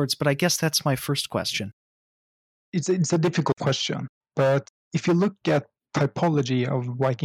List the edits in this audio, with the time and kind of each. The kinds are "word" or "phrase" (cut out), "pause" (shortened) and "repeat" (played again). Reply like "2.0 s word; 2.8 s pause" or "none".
4.2 s pause; 5.8 s word